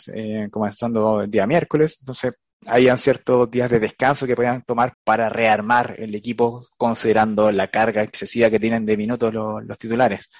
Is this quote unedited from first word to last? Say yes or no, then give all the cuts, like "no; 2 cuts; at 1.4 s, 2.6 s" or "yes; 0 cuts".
no; 1 cut; at 4.9 s